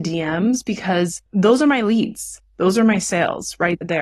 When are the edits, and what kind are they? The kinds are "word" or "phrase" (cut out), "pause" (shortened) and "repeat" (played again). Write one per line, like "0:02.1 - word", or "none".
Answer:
0:01.3 - pause

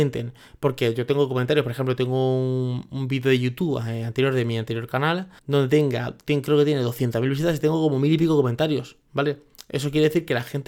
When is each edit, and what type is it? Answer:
0:05.4 - pause

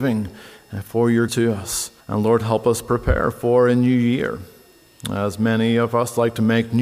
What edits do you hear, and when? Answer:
0:01.3 - word
0:02.0 - pause

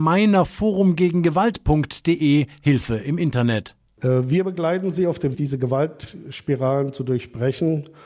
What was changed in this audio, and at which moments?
0:05.3 - word

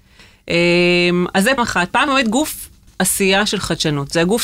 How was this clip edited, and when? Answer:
0:01.6 - word
0:02.1 - word
0:02.9 - word

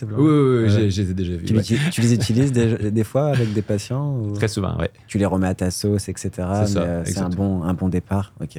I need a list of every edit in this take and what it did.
none

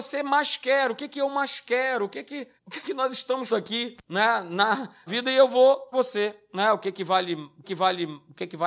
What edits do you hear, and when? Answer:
0:02.6 - pause
0:03.5 - word
0:04.0 - pause
0:05.1 - word
0:05.9 - phrase
0:07.6 - repeat

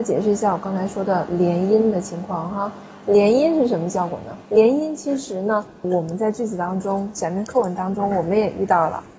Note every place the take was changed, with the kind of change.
0:04.4 - pause
0:05.8 - phrase

